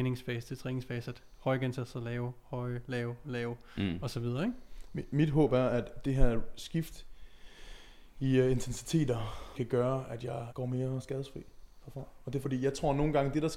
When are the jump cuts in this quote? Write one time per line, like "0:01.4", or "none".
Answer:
0:03.2
0:09.5
0:10.5
0:12.4